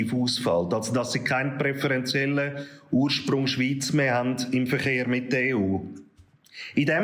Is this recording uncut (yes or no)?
yes